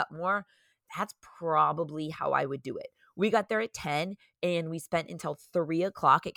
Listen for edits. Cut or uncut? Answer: uncut